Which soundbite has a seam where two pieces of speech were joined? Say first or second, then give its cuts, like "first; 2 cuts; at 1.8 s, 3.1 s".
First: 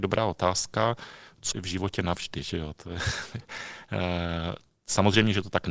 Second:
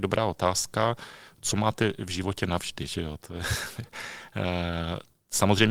first; 1 cut; at 1.5 s